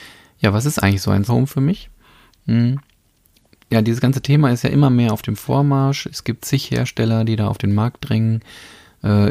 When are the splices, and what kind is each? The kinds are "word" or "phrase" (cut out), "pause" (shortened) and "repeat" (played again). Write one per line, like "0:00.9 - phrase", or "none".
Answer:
0:01.3 - word